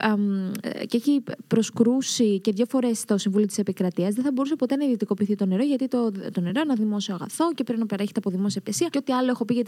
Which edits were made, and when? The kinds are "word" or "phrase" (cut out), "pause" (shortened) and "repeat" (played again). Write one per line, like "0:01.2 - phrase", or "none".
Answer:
none

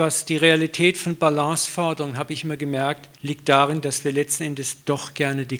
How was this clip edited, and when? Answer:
0:03.1 - pause

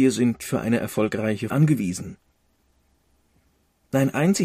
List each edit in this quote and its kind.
0:01.5 - phrase

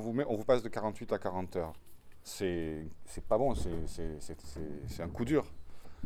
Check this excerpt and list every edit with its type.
none

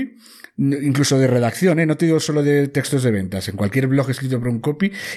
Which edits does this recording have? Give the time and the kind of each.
none

